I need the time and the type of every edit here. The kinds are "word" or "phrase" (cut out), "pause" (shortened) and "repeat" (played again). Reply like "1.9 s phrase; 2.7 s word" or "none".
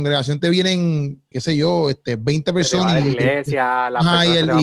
1.3 s word

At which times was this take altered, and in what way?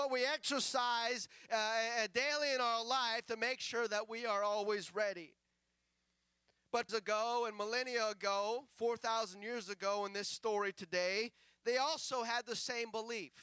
6.9 s phrase

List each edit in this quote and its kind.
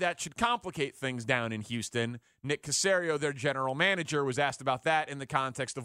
none

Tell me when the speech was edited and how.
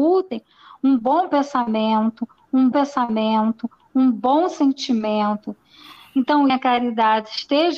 2.7 s repeat; 6.5 s phrase

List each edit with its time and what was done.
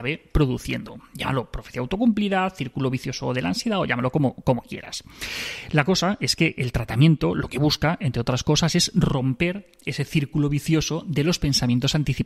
none

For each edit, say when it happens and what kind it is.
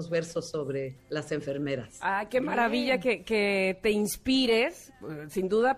none

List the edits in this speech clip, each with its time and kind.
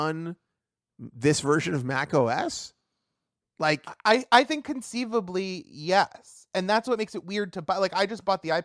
none

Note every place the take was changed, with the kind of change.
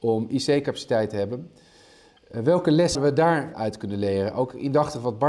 2.9 s word; 3.5 s word

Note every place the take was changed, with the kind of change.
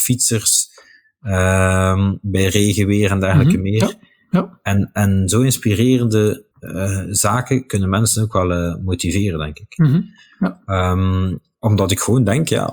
6.5 s pause

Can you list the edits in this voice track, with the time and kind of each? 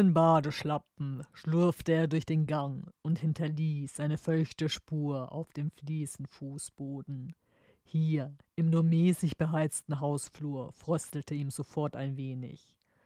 none

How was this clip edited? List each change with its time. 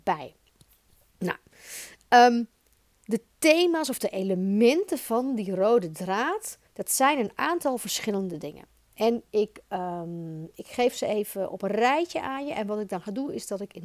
6.7 s pause

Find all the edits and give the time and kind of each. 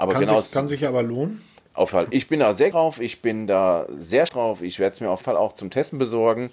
1.9 s word; 2.7 s word; 4.3 s word; 5.2 s word

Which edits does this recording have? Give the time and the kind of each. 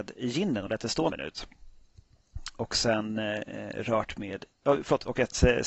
1.1 s word

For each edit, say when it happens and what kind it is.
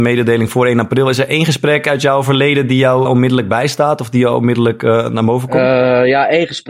3.1 s word

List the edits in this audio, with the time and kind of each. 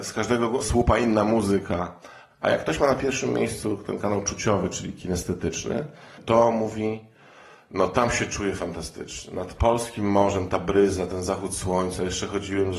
none

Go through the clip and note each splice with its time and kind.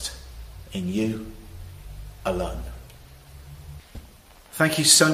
none

